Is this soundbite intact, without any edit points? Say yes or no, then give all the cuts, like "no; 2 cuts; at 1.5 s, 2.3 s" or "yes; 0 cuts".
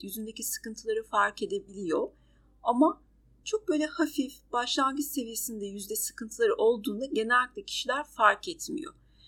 yes; 0 cuts